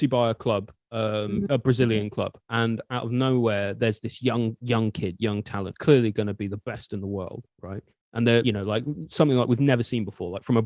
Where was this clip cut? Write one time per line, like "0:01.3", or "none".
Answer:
0:02.4
0:05.7
0:07.5
0:08.4

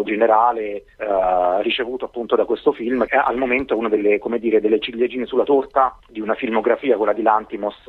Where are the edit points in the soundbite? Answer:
0:00.9
0:03.1
0:06.0

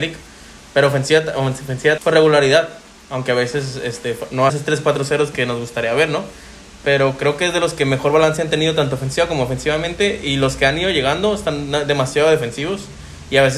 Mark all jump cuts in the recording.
0:02.0
0:04.5

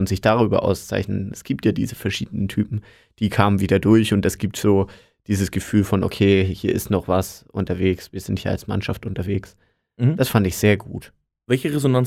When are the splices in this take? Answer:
none

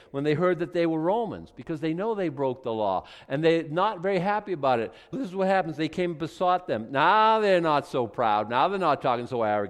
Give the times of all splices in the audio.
0:05.1

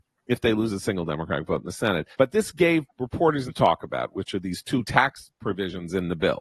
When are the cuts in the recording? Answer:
0:02.1
0:02.9
0:03.5

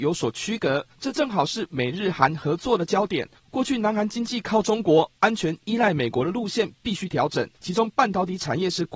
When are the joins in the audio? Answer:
0:07.5

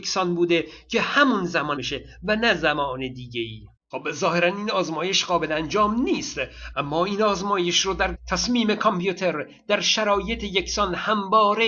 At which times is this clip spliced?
0:01.8
0:03.8
0:06.7
0:08.1

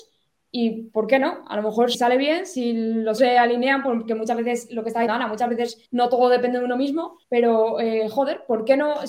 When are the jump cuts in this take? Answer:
0:01.9
0:03.2
0:05.1
0:05.9
0:07.2

